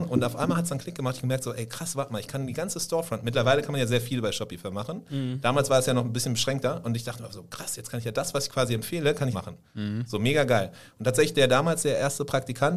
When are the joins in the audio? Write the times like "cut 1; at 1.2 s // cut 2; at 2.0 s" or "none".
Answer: cut 1; at 9.3 s